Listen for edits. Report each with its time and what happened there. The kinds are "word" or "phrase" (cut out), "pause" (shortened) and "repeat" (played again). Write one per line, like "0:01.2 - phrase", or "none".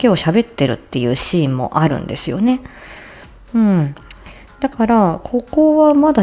none